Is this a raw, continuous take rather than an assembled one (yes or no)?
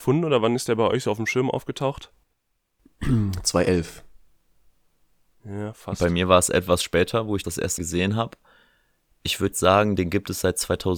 no